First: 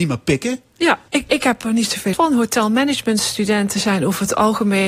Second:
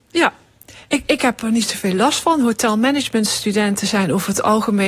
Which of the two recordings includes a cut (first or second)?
first